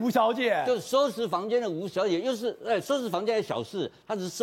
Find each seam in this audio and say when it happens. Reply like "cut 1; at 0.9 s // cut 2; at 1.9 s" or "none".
none